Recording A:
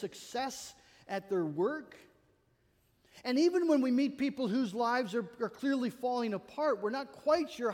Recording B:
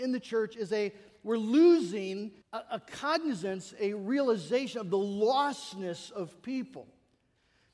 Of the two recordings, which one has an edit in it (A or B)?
B